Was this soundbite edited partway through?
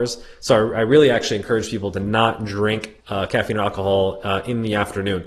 yes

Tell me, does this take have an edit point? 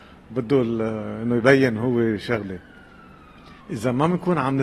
yes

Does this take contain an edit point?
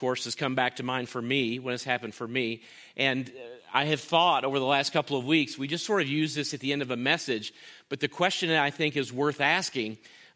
no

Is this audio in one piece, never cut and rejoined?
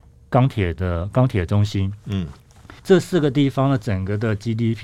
no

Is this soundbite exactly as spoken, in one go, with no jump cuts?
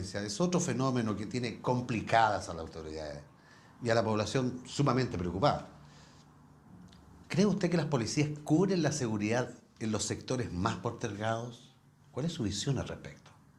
yes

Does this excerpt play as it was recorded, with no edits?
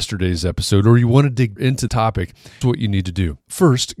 no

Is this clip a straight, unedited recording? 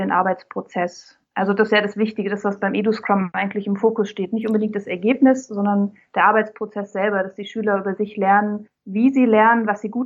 no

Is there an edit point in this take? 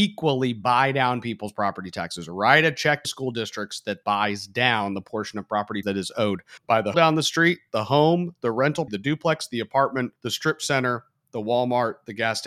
yes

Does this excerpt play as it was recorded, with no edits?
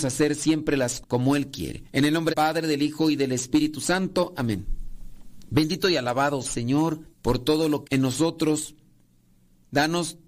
no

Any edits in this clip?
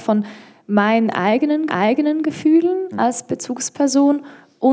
yes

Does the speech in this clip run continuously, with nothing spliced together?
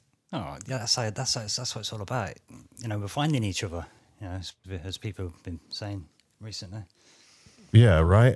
yes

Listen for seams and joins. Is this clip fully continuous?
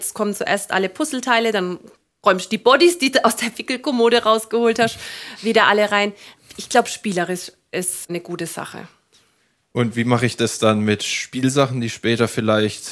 yes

